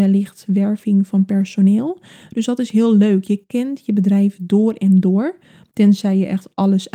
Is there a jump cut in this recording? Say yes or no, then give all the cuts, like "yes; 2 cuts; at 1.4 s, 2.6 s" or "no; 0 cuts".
no; 0 cuts